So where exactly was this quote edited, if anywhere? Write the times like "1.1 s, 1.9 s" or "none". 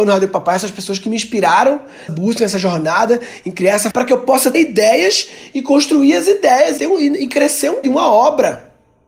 2.1 s, 3.9 s, 4.5 s, 6.8 s, 7.8 s

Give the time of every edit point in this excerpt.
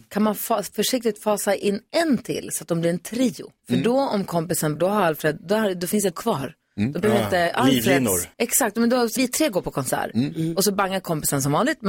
3.6 s, 4.8 s, 6.1 s, 8.3 s, 9.2 s

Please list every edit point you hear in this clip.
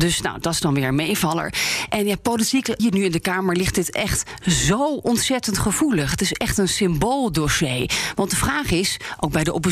2.8 s

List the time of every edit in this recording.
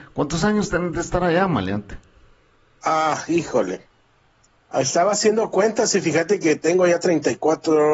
none

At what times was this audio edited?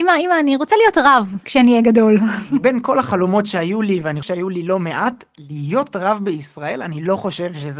4.2 s

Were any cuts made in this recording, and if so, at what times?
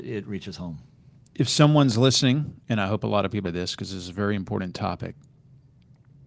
3.4 s

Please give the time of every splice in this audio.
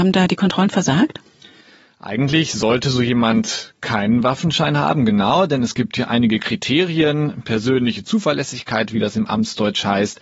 none

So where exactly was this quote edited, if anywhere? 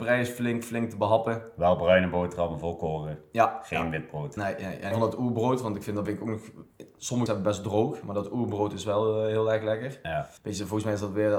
4.4 s, 4.9 s, 6.0 s, 7.3 s, 10.4 s

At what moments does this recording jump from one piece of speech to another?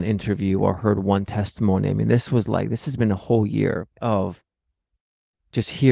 3.9 s

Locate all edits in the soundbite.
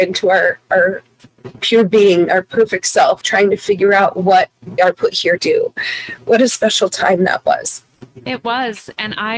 3.2 s, 4.8 s, 5.4 s

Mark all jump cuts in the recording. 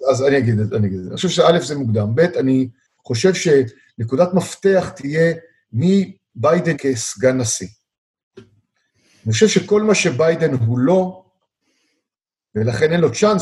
6.7 s

